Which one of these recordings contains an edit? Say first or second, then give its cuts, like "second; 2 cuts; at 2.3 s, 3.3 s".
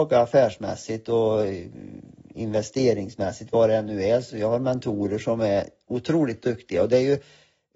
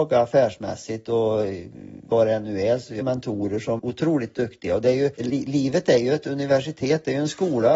second; 4 cuts; at 2.1 s, 3.0 s, 3.8 s, 5.2 s